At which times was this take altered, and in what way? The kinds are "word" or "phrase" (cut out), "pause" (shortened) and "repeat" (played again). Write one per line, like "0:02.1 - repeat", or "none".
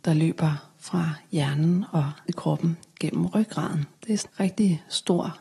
0:02.3 - word
0:04.3 - word